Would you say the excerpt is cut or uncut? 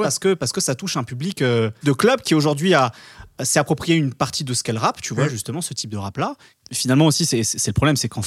uncut